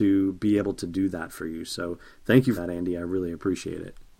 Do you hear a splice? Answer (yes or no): yes